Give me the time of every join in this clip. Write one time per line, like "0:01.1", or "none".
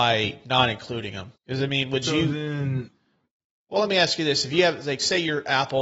0:01.4